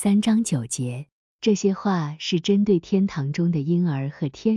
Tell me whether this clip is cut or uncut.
uncut